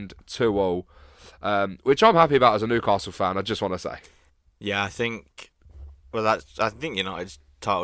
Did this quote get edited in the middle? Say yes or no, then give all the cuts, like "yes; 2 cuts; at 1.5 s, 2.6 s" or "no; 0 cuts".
no; 0 cuts